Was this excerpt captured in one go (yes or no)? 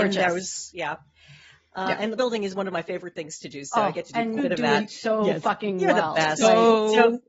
no